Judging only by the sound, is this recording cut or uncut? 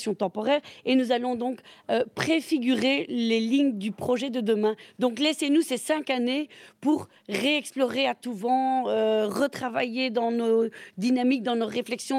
uncut